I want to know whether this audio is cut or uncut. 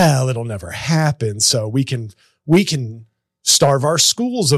uncut